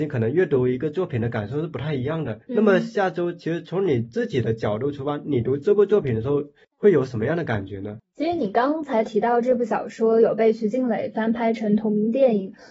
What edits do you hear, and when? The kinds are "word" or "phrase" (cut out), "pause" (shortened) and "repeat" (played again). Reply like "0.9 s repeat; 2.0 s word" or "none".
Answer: 2.4 s pause